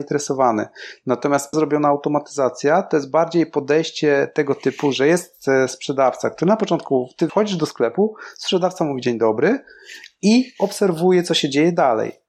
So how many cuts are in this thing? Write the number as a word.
two